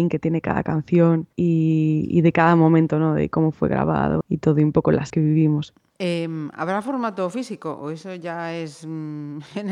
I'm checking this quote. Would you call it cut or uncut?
cut